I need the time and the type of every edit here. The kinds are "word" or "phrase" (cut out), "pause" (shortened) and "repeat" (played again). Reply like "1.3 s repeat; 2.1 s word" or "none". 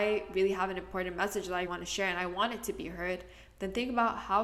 1.7 s word